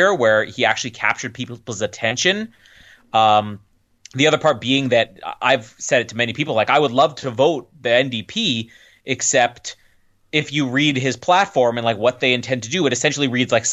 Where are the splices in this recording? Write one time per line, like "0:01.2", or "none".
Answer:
none

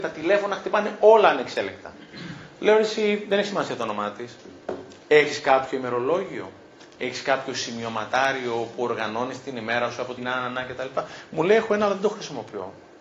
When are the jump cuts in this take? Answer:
0:10.2

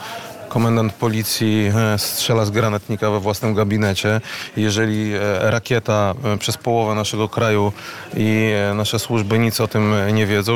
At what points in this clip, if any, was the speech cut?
0:06.4

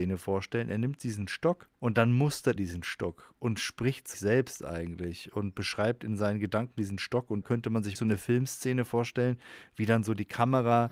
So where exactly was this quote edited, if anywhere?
0:01.7
0:02.6
0:04.1
0:07.4
0:08.0

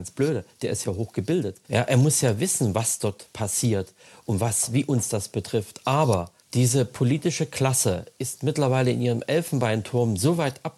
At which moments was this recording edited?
0:01.6
0:06.4

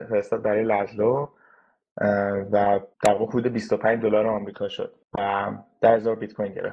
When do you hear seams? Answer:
0:02.9
0:05.0

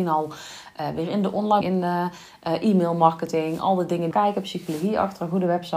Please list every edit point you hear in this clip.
0:01.6
0:04.1

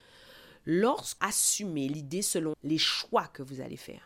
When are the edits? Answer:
0:01.2
0:02.5

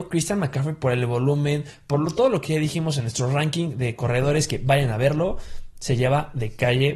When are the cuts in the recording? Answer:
none

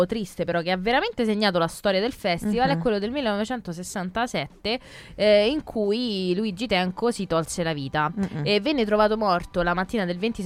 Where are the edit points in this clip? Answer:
none

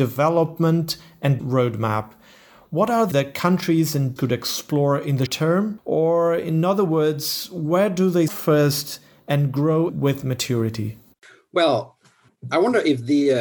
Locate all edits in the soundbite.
0:01.4
0:03.1
0:04.2
0:05.3
0:08.3
0:09.9

